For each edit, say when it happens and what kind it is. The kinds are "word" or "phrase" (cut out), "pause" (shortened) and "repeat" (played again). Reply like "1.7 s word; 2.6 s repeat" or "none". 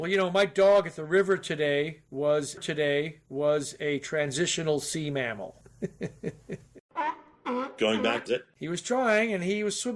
2.6 s repeat; 8.3 s phrase